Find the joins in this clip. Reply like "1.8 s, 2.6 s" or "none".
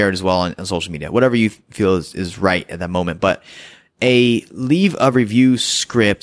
none